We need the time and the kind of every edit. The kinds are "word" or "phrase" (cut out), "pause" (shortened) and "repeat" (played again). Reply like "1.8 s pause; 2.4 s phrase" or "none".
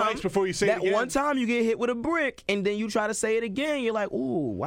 none